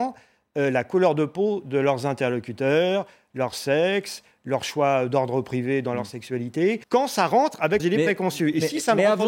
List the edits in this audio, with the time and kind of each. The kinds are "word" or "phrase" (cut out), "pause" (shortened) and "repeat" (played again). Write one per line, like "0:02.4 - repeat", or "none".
0:06.8 - pause
0:07.8 - word